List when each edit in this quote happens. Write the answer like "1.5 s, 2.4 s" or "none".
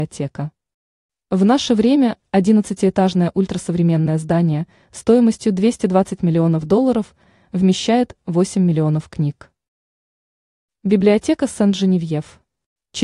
none